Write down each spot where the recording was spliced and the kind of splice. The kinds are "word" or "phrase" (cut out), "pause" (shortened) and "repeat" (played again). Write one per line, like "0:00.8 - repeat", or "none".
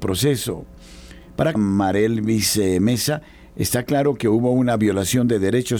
0:01.5 - phrase